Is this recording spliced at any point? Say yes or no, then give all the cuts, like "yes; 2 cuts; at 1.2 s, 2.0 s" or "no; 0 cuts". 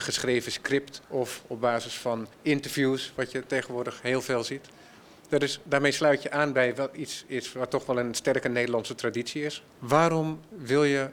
yes; 3 cuts; at 1.0 s, 2.3 s, 9.7 s